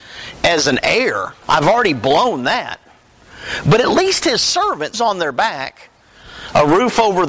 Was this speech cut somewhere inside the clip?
yes; 2 cuts; at 1.4 s, 4.9 s

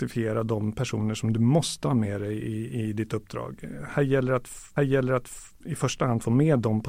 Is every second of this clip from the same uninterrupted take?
no; 1 cut; at 4.8 s

